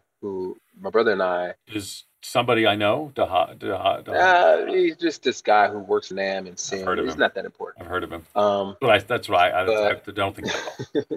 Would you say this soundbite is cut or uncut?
cut